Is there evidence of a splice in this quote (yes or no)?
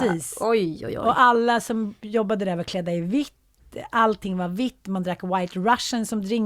no